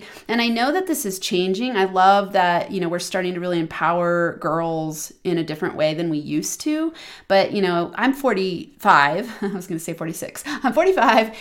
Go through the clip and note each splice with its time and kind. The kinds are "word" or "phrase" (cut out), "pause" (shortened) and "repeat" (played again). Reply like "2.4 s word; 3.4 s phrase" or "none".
none